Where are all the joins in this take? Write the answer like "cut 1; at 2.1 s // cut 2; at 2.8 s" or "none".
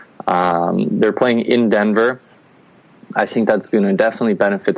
none